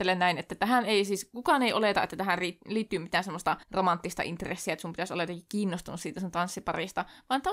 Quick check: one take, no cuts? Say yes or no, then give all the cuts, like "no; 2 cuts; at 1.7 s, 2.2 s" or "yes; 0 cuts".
no; 1 cut; at 3.6 s